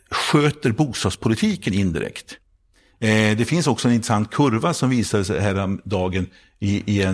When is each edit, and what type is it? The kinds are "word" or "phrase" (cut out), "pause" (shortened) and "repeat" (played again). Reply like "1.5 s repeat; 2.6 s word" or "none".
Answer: none